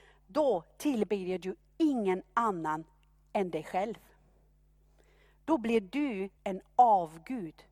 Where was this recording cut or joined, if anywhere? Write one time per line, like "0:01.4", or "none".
0:06.4